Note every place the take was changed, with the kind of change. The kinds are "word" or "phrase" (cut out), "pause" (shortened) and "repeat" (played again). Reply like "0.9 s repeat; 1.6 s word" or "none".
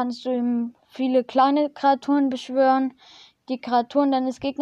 none